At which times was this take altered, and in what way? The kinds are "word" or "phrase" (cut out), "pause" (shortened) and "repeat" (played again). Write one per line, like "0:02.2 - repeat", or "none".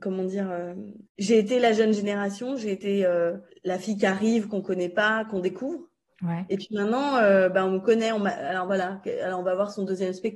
0:01.1 - pause
0:03.5 - pause
0:06.1 - pause